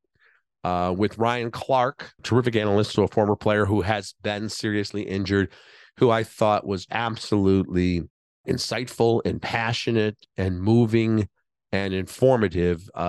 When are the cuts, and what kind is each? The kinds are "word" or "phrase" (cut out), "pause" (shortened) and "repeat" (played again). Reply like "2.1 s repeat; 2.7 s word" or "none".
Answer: 2.2 s word; 2.9 s word; 6.9 s word